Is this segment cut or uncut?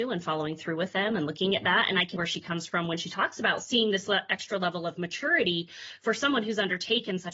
cut